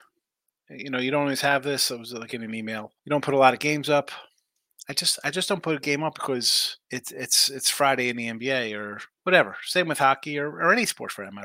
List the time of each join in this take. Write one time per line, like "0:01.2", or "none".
0:03.0
0:06.8
0:09.1